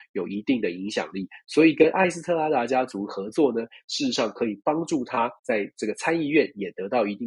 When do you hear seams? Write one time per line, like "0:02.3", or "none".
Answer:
0:05.4